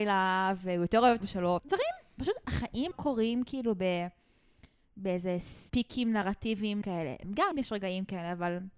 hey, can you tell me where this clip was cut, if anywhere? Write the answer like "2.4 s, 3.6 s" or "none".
1.2 s, 1.6 s, 2.9 s, 5.7 s, 6.8 s, 7.5 s

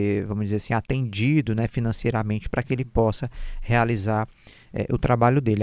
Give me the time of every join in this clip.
none

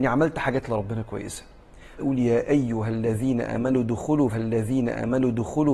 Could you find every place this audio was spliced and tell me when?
2.0 s, 4.3 s

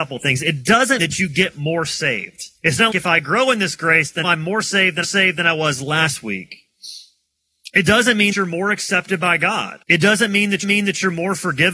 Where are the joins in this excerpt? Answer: 1.0 s, 2.6 s, 2.9 s, 4.2 s, 5.0 s, 8.3 s, 9.8 s, 10.6 s

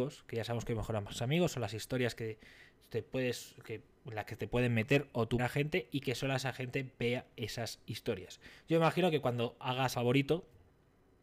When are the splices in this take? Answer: 5.4 s, 9.9 s

